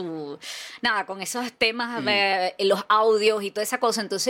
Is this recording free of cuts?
yes; 0 cuts

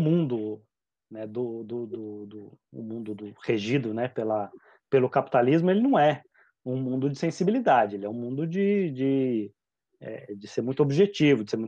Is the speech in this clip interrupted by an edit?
no; 0 cuts

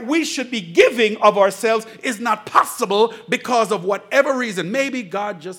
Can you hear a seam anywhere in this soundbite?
no; 0 cuts

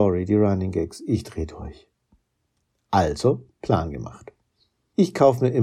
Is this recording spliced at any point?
no; 0 cuts

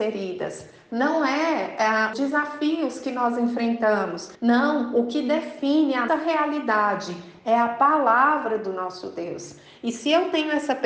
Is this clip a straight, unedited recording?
no; 3 cuts; at 2.1 s, 4.3 s, 6.1 s

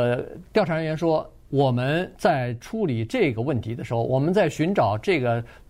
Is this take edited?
yes; 1 cut; at 2.1 s

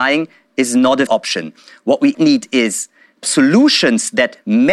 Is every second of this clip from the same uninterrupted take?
no; 3 cuts; at 1.1 s, 2.1 s, 3.2 s

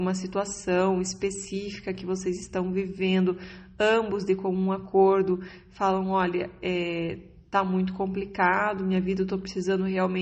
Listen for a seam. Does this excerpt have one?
no; 0 cuts

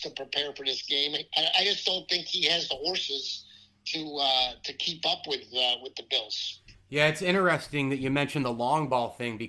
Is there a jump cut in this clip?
no; 0 cuts

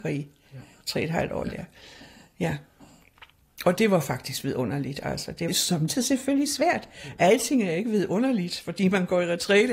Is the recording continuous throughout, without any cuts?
no; 2 cuts; at 1.4 s, 5.5 s

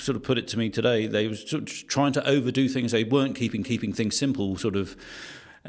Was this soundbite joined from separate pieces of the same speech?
yes; 1 cut; at 3.6 s

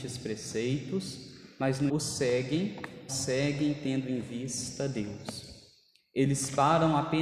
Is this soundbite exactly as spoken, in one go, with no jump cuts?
no; 2 cuts; at 1.9 s, 3.1 s

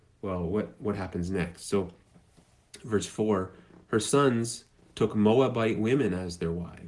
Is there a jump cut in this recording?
no; 0 cuts

